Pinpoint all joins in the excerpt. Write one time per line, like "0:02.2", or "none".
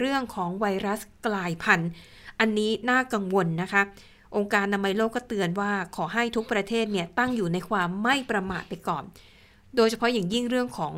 none